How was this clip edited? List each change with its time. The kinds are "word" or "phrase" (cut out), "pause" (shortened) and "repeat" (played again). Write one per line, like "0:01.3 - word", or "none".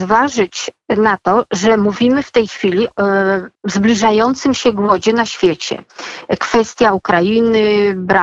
0:02.9 - word
0:03.5 - pause